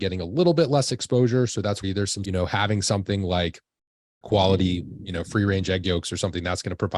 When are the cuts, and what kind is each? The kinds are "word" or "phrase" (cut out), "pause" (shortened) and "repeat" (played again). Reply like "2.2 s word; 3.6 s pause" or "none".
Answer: 1.8 s word; 2.2 s phrase; 4.2 s word